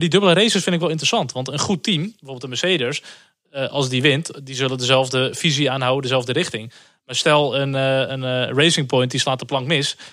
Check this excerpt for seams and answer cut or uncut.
uncut